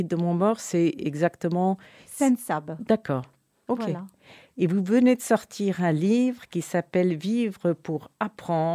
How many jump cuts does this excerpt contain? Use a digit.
0